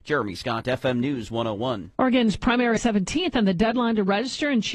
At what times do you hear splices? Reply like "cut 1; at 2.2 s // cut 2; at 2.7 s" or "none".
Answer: cut 1; at 2.8 s